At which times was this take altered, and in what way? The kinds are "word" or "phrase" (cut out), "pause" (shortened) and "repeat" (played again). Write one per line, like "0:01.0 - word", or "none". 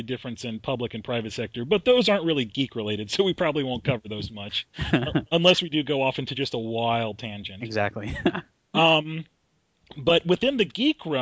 none